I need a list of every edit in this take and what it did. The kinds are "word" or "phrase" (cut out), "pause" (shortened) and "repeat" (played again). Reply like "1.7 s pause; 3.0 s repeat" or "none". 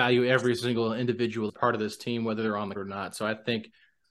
1.5 s word; 2.7 s word